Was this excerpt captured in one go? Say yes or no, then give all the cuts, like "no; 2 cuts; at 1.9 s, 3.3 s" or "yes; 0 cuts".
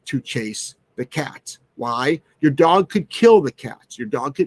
yes; 0 cuts